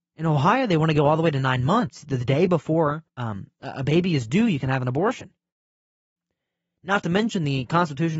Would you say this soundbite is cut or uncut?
cut